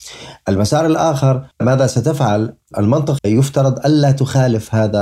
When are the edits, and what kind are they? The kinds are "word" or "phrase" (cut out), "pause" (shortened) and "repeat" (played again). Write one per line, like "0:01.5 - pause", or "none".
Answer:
0:01.5 - pause
0:03.2 - phrase